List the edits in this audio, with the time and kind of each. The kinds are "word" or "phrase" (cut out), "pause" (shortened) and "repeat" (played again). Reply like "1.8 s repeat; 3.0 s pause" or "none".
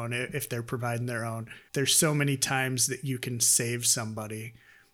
1.7 s word

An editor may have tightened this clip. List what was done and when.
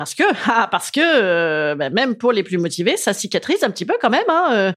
none

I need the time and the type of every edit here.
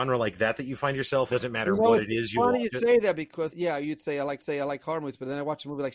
1.3 s phrase; 3.5 s word; 4.4 s repeat

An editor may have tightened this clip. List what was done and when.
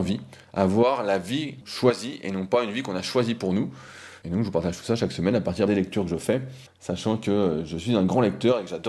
1.6 s word; 4.2 s word; 5.7 s phrase; 6.7 s pause

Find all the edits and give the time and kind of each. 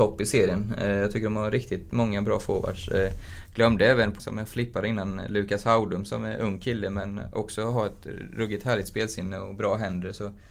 4.2 s word

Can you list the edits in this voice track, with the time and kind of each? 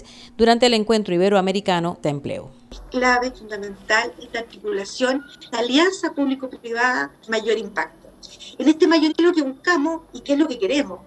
2.0 s word; 5.5 s word; 7.3 s phrase; 9.1 s word

